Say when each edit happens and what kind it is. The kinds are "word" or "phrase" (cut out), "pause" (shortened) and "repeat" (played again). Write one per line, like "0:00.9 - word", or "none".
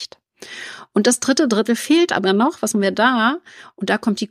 0:02.7 - word